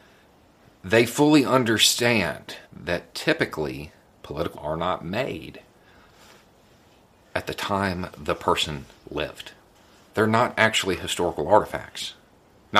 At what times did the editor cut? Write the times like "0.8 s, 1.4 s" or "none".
2.7 s, 4.5 s, 9.7 s